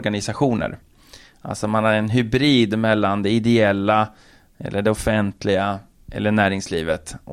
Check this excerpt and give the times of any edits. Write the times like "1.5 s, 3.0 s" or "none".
none